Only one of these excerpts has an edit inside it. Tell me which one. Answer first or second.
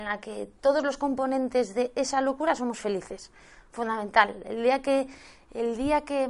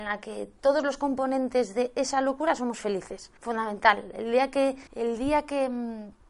second